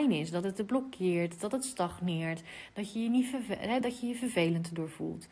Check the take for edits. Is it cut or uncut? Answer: uncut